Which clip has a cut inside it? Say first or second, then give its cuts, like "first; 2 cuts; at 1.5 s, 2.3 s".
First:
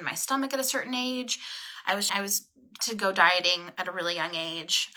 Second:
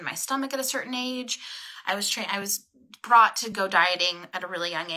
first; 2 cuts; at 2.1 s, 2.8 s